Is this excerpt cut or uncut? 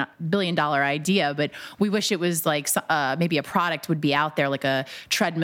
uncut